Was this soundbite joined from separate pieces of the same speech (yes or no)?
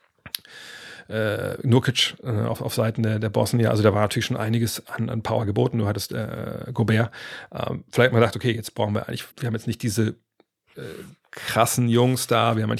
yes